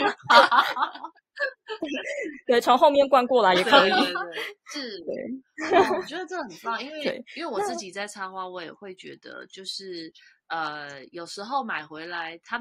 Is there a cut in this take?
no; 0 cuts

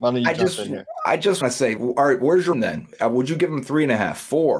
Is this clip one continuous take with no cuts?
no; 3 cuts; at 1.4 s, 1.8 s, 2.5 s

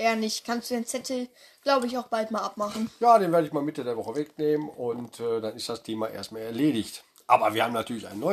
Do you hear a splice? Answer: no; 0 cuts

